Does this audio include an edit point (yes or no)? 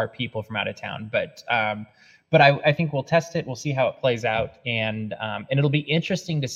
no